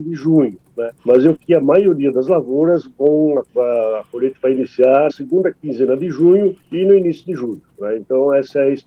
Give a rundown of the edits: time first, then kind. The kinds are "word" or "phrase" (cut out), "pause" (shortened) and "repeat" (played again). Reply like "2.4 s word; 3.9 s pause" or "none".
1.0 s pause; 1.3 s word; 3.5 s pause; 5.1 s word; 6.6 s pause